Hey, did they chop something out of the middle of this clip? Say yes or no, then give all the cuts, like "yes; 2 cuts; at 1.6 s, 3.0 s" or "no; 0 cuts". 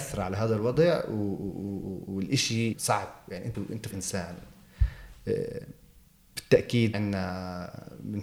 yes; 4 cuts; at 2.7 s, 3.5 s, 3.9 s, 6.9 s